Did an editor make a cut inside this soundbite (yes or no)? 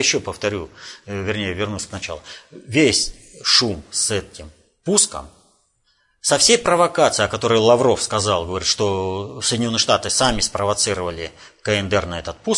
no